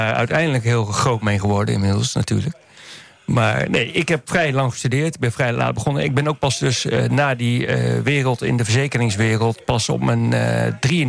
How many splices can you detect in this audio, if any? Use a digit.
0